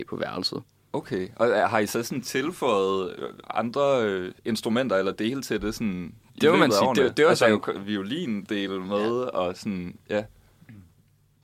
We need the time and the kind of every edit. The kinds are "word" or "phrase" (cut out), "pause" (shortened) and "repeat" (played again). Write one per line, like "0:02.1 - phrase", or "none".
0:04.4 - pause